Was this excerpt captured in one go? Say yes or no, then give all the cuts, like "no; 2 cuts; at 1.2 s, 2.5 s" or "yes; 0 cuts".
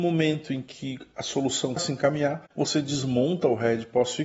no; 1 cut; at 1.8 s